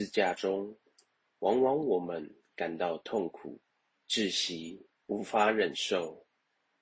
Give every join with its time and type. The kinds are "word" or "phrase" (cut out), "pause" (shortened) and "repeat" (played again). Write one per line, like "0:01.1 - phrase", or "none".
0:03.7 - pause
0:05.0 - pause